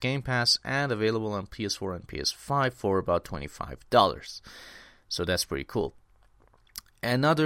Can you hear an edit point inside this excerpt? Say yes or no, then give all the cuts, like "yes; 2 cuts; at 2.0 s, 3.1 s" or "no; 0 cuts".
no; 0 cuts